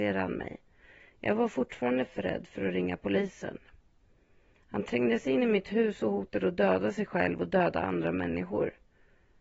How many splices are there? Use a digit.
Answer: 0